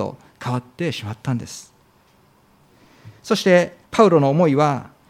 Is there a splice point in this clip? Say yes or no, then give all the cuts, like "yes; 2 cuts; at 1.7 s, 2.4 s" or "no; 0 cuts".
yes; 1 cut; at 3.9 s